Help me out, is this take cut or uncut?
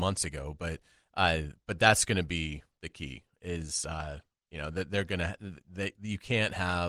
uncut